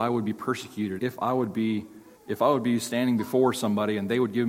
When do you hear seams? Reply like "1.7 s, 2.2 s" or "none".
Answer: 1.0 s, 2.2 s